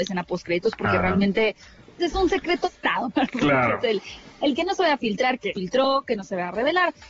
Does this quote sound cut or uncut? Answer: cut